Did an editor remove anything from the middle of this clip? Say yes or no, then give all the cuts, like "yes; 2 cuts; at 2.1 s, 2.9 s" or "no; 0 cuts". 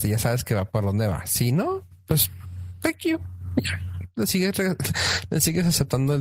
no; 0 cuts